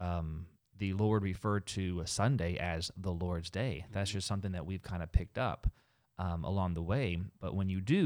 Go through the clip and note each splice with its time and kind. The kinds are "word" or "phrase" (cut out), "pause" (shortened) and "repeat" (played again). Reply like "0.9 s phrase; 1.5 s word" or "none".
none